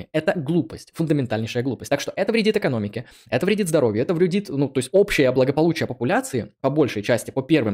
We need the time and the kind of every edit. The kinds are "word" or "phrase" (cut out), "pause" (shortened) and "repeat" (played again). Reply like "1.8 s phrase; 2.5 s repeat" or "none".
none